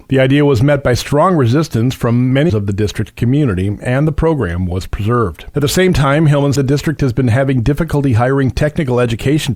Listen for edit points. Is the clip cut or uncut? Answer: cut